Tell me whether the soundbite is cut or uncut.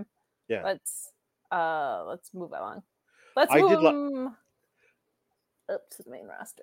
uncut